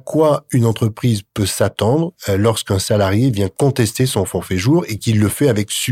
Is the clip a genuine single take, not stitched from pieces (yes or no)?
yes